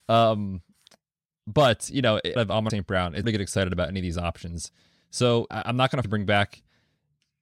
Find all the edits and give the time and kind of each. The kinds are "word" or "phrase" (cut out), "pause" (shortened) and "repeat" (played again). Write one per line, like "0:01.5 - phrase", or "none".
0:02.4 - word
0:02.7 - word
0:03.2 - word
0:05.5 - word
0:06.0 - word

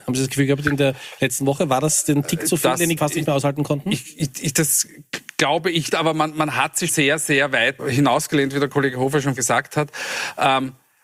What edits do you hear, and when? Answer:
0:03.0 - word
0:05.9 - word
0:06.9 - word
0:07.8 - word
0:09.4 - word

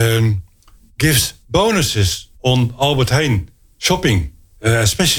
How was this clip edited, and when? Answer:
none

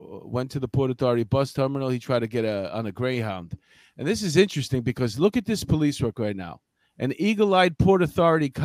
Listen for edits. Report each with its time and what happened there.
none

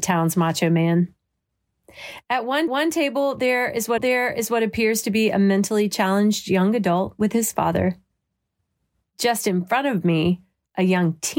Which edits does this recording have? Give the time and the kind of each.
0:02.7 - repeat
0:04.0 - repeat

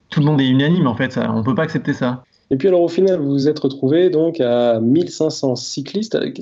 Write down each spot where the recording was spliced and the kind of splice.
none

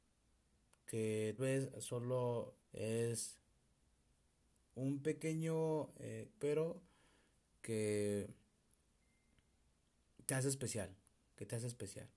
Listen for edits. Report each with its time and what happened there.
0:01.4 - word
0:02.6 - word
0:06.3 - word

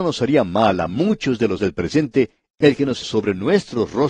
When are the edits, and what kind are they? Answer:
0:01.6 - word
0:03.0 - word

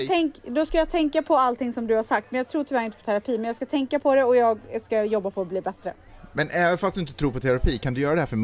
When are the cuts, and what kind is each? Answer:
none

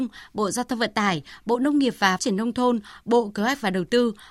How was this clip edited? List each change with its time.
0:02.2 - word

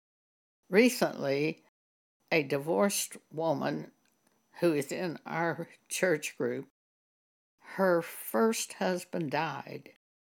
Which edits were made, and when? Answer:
none

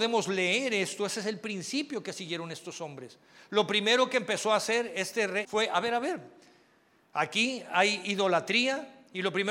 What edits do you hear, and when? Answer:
0:05.4 - word

